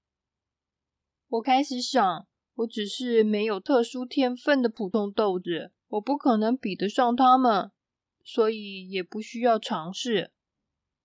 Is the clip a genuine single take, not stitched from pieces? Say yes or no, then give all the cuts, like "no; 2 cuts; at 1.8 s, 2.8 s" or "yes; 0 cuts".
no; 2 cuts; at 2.3 s, 5.8 s